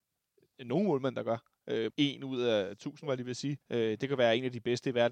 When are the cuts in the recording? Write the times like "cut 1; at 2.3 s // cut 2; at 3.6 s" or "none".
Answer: cut 1; at 1.9 s // cut 2; at 3.6 s